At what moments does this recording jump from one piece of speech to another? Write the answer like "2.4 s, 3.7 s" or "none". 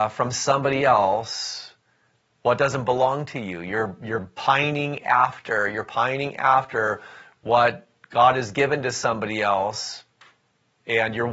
none